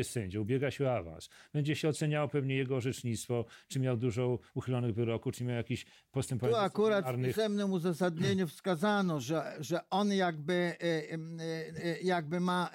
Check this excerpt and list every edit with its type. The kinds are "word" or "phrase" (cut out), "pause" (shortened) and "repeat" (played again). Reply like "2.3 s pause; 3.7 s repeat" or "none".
none